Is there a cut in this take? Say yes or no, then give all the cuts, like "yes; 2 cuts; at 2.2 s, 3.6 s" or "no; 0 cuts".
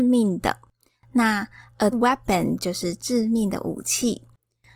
yes; 1 cut; at 1.9 s